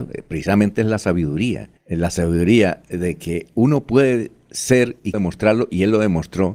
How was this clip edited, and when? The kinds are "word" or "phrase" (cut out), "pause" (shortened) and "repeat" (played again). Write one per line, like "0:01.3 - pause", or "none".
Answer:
0:05.1 - word